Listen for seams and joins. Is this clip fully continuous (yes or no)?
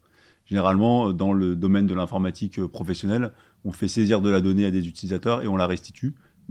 yes